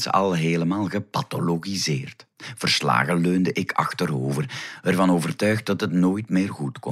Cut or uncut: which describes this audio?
cut